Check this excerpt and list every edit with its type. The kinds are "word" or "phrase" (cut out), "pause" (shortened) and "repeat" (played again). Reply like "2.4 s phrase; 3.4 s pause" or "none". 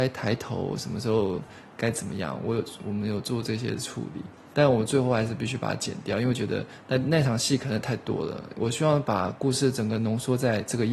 none